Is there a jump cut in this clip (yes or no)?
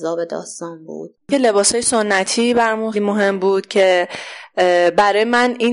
yes